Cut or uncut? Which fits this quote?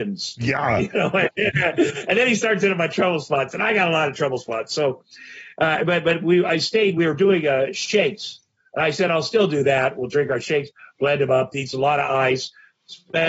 uncut